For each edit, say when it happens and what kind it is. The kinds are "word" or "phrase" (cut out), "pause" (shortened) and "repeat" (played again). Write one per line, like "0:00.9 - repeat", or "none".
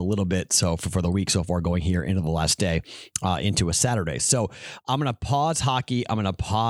none